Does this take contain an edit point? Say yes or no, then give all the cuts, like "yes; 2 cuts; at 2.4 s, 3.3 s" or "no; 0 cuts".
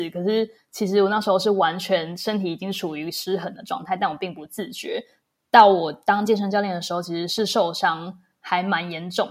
no; 0 cuts